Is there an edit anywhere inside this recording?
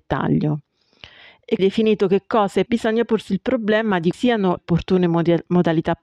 yes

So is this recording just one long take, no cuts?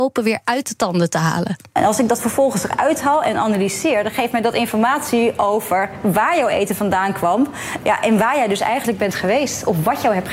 yes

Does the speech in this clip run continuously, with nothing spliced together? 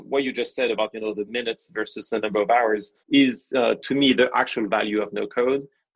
no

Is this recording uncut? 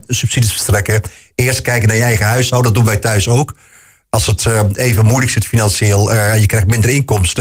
yes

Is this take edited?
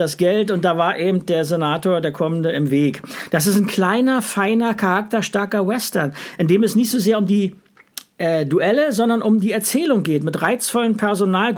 no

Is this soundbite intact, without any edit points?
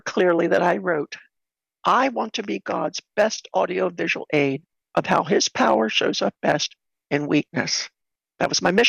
yes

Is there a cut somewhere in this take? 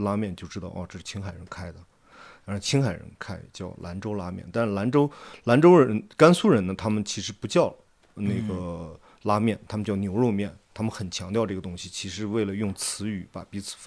no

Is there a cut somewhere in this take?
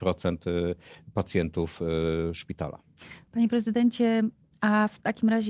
no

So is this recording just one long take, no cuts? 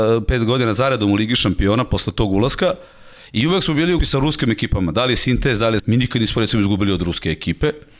no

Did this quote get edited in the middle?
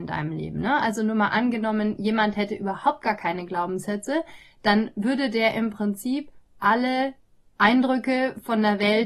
no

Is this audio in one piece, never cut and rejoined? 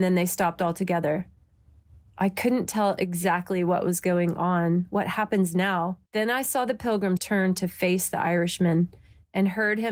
no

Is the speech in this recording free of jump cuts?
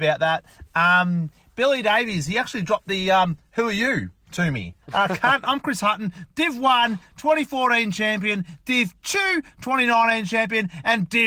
no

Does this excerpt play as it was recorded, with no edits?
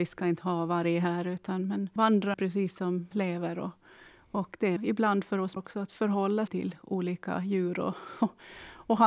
no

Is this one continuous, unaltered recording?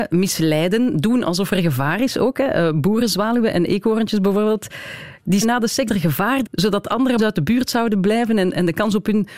no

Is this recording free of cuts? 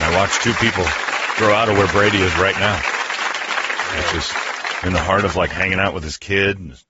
yes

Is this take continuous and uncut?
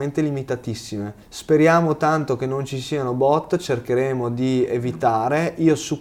no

